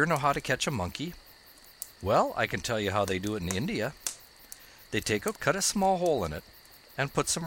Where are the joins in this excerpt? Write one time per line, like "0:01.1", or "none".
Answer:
0:05.3